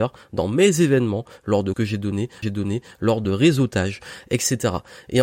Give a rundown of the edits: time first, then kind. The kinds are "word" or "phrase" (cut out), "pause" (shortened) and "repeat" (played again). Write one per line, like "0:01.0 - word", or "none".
0:01.7 - word
0:02.4 - repeat
0:03.2 - phrase